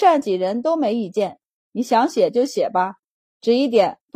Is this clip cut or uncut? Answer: uncut